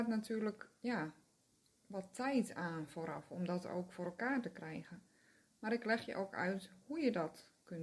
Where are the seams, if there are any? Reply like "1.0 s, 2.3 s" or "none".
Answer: none

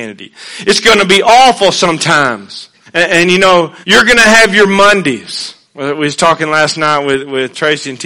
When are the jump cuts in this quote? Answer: 2.9 s, 3.8 s, 5.6 s

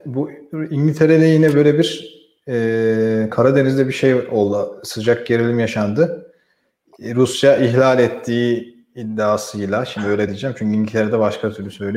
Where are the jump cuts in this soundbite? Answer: none

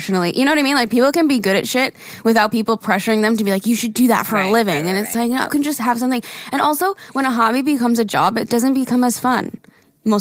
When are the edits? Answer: 5.5 s

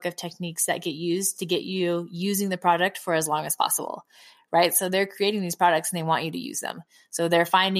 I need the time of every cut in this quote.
none

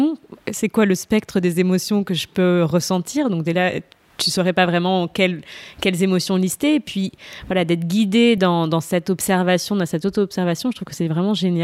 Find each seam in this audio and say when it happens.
none

